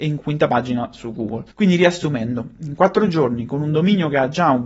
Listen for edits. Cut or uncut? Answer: cut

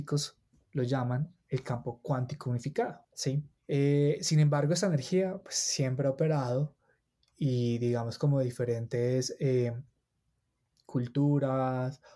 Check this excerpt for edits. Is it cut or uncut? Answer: uncut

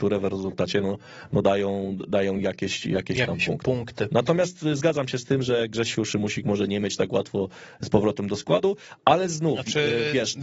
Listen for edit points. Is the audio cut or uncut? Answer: uncut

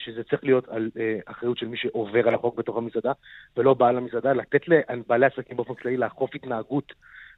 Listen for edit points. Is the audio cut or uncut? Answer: uncut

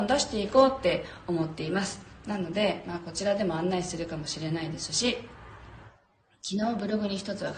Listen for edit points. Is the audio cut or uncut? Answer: uncut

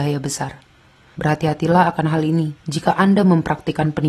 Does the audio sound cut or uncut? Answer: cut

